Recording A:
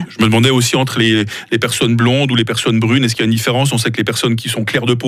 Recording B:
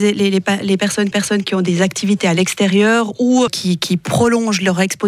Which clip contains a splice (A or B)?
B